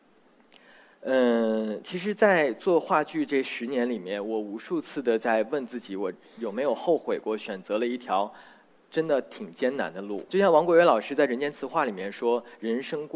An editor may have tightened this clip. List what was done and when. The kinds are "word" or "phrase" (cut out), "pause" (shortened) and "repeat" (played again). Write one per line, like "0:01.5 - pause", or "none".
none